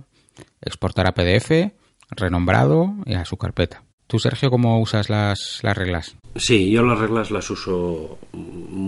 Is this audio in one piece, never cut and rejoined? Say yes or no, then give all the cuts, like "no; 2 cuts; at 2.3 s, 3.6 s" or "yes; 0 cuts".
no; 1 cut; at 1.9 s